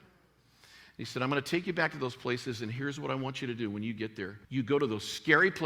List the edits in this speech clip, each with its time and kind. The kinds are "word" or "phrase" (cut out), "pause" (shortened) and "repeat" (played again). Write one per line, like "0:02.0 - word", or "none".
0:04.4 - pause